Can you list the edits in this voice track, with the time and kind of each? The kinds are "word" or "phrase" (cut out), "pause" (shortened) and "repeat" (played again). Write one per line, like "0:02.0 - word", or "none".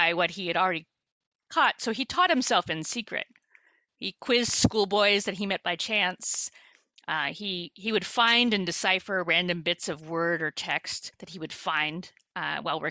0:11.1 - pause